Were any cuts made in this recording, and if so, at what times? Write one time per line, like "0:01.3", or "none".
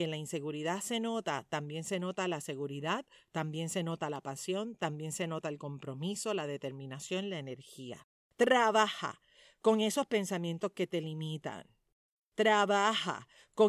none